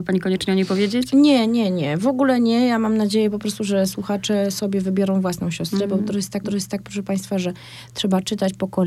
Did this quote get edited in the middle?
yes; 1 cut; at 6.4 s

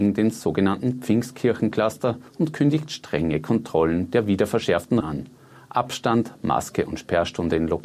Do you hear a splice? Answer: yes; 2 cuts; at 2.3 s, 5.0 s

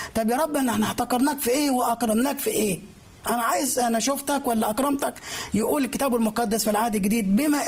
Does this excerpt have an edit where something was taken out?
no; 0 cuts

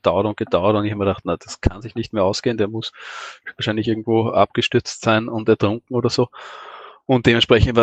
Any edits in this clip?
no; 0 cuts

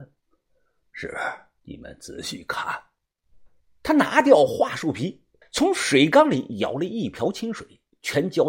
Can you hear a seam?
yes; 3 cuts; at 1.6 s, 3.6 s, 5.4 s

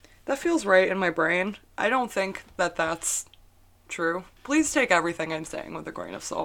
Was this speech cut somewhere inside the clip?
no; 0 cuts

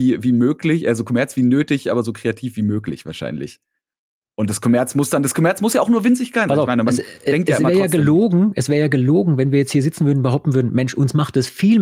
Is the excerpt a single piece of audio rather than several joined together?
yes; 0 cuts

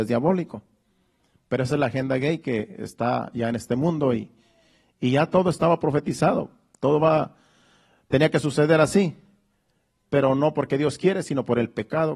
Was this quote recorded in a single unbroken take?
yes; 0 cuts

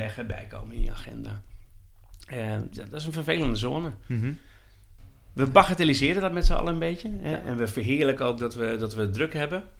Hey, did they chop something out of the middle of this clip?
no; 0 cuts

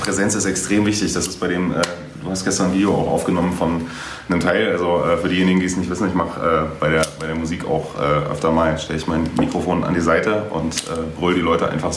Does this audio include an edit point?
no; 0 cuts

